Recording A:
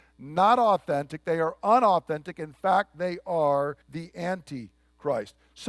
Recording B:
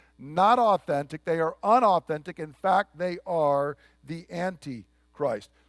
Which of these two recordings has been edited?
A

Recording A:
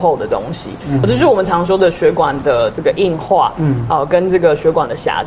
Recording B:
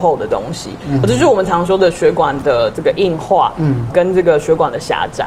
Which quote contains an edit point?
B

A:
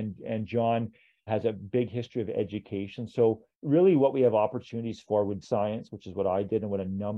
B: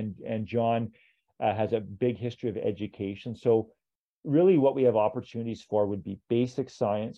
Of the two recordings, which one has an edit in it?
A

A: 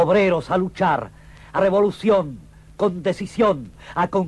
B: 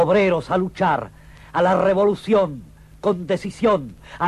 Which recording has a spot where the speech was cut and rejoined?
A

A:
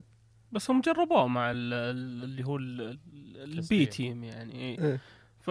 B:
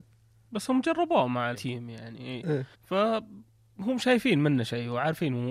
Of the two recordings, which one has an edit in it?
B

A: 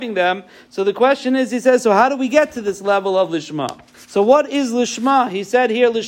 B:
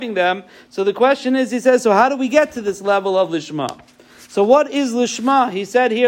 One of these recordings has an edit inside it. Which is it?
A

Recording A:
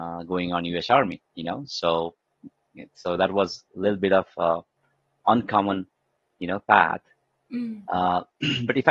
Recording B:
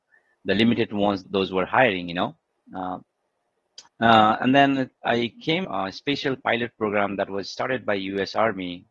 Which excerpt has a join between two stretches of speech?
B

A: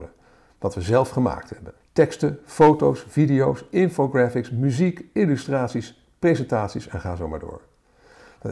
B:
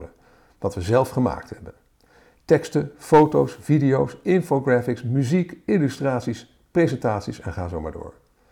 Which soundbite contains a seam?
A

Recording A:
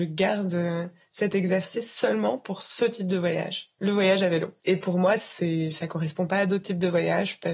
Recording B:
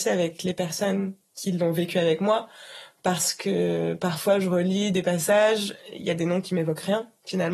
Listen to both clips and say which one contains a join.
A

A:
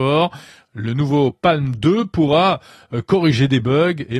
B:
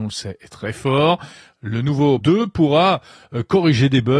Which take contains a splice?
B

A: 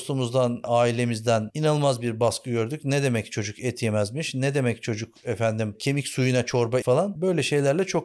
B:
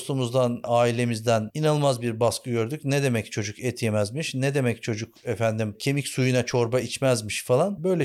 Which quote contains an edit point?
A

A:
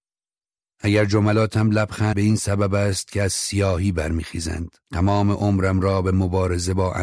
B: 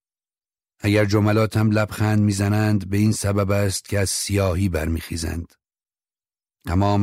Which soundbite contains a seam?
A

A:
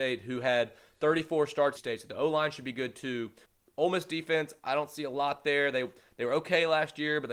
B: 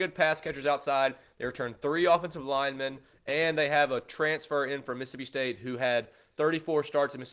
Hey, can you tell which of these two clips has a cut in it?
A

